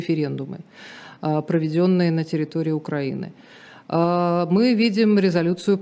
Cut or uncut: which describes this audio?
uncut